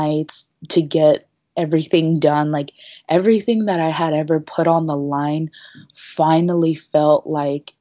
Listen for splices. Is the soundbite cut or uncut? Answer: uncut